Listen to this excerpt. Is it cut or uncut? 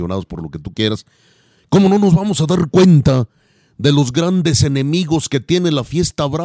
uncut